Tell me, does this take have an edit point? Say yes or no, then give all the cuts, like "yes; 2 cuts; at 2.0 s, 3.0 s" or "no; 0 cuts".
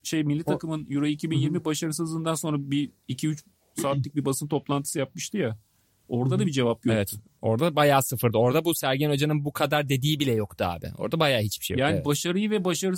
no; 0 cuts